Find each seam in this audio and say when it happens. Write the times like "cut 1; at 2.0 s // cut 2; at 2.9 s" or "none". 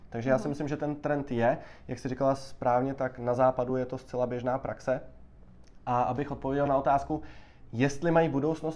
none